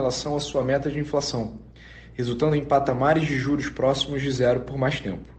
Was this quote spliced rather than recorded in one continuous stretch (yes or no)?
no